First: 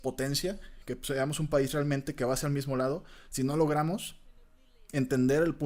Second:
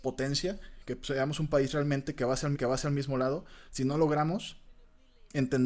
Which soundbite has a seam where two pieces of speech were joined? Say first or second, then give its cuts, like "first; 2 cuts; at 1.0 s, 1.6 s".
second; 1 cut; at 2.5 s